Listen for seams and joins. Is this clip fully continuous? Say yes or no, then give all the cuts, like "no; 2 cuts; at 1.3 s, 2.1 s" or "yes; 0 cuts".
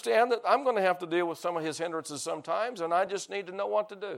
yes; 0 cuts